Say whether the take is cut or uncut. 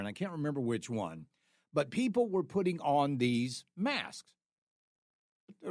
uncut